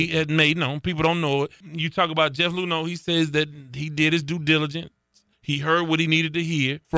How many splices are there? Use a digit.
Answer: 0